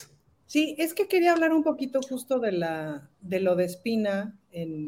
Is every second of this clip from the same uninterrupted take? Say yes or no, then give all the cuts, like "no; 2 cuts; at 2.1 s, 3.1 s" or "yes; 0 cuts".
yes; 0 cuts